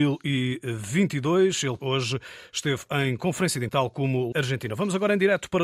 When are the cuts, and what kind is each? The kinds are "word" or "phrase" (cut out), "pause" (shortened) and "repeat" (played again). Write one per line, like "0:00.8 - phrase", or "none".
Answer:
0:01.8 - word
0:03.7 - word
0:04.3 - phrase